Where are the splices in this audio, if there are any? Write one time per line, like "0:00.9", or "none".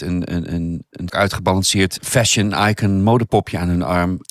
0:01.1
0:02.0